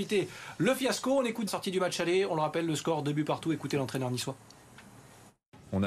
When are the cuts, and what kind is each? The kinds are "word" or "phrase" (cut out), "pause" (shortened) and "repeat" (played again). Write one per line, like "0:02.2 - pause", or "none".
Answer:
0:01.5 - phrase